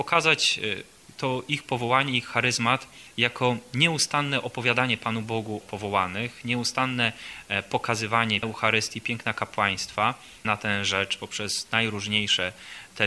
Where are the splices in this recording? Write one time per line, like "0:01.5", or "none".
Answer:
0:05.6
0:08.4
0:10.4